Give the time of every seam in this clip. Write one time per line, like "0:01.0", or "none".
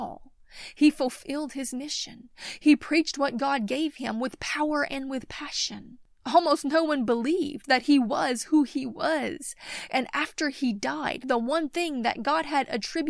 none